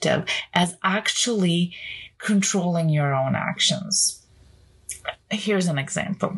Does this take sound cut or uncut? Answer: uncut